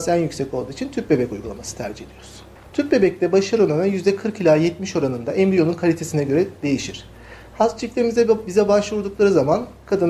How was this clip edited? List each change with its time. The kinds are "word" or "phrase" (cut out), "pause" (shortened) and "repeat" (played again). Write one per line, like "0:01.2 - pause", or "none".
0:02.6 - pause